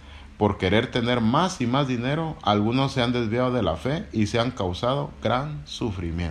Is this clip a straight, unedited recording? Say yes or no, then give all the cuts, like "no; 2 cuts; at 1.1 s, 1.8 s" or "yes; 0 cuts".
yes; 0 cuts